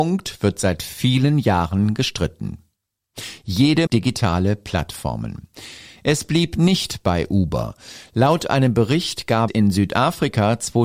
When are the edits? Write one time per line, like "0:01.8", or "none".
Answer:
0:03.9
0:09.5